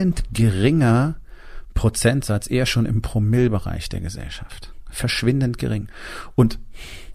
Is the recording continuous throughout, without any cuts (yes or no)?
yes